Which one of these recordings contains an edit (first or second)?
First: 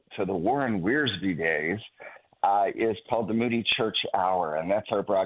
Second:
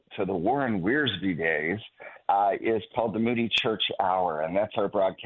second